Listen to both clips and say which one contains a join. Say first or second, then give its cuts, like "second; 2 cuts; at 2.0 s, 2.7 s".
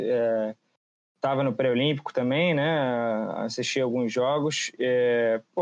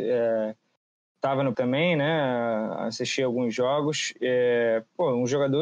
second; 1 cut; at 1.5 s